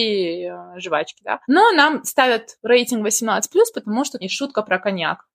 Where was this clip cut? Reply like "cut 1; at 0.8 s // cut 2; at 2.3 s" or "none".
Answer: cut 1; at 1.4 s // cut 2; at 4.2 s